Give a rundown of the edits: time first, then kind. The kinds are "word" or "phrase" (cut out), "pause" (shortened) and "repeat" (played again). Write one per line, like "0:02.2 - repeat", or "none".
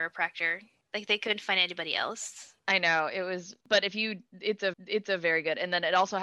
0:02.6 - pause
0:03.6 - pause
0:04.7 - repeat

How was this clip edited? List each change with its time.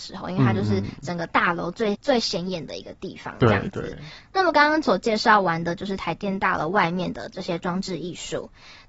0:01.9 - word

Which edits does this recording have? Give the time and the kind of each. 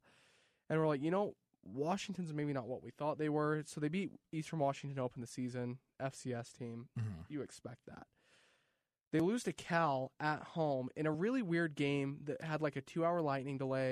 none

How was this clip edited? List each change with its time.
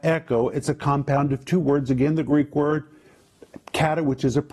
0:03.6 - pause

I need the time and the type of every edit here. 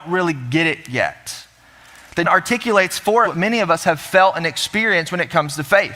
0:02.2 - word
0:03.2 - word

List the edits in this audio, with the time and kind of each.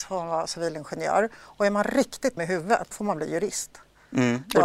0:02.4 - word
0:02.9 - word

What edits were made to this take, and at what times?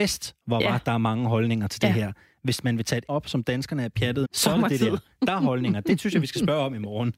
0:03.1 - word
0:04.2 - word

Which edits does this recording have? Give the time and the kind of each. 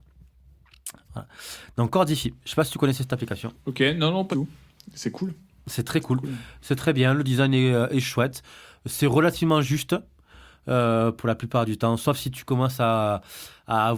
0:04.3 - word

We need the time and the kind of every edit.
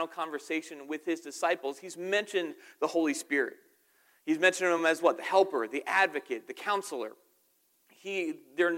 none

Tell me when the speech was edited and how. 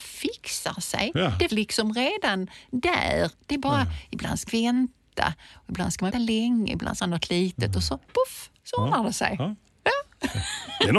0:01.5 - word
0:04.5 - word
0:06.1 - word
0:07.0 - phrase
0:08.1 - word
0:08.6 - pause

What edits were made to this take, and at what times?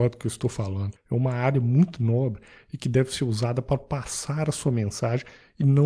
none

